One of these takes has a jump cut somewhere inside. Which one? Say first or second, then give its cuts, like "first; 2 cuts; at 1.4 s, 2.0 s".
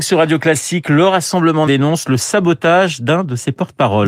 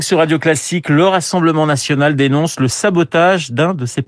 first; 1 cut; at 1.7 s